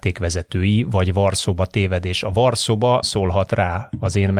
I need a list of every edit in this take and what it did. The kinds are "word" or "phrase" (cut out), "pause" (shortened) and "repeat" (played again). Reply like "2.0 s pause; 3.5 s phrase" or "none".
3.0 s word

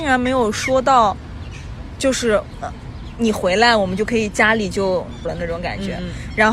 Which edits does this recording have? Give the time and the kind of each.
5.3 s word

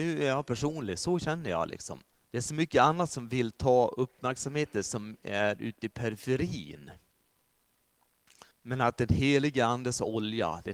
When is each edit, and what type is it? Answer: 2.1 s pause; 8.5 s pause

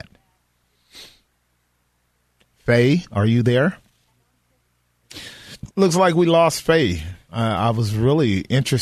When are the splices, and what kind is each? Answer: 5.7 s pause

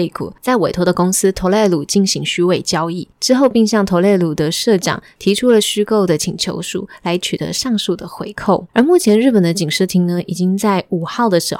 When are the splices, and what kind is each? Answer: 8.7 s pause

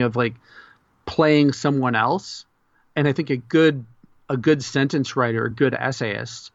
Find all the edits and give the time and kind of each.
none

